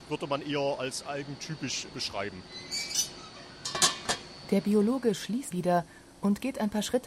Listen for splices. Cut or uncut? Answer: cut